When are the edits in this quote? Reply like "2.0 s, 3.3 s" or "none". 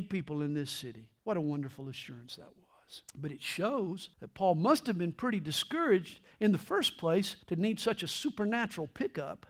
1.2 s, 3.1 s, 4.1 s, 7.4 s